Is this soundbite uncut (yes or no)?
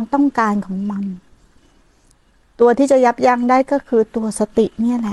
yes